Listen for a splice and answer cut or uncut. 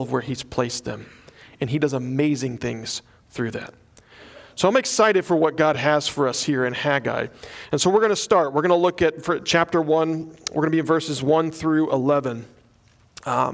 uncut